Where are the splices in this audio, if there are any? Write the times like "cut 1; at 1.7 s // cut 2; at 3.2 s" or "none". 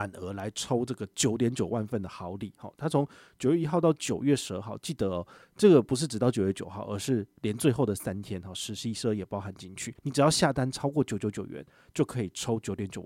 cut 1; at 10.0 s